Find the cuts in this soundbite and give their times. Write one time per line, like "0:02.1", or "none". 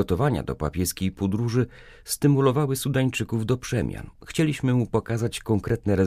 none